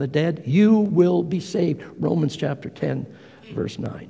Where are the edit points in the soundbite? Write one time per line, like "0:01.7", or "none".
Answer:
none

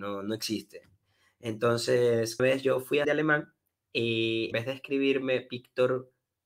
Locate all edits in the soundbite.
0:02.4
0:03.0
0:04.5

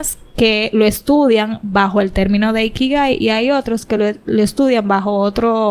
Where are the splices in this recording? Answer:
none

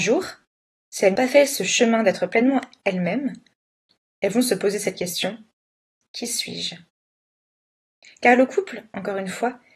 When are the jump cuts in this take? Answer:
0:01.2

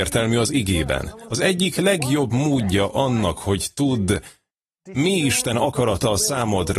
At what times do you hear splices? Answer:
none

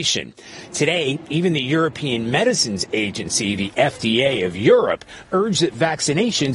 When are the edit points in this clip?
none

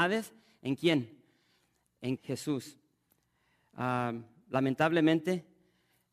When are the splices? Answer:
0:02.2

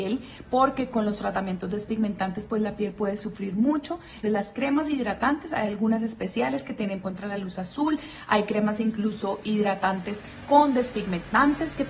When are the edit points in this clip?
0:04.2
0:07.0
0:09.4

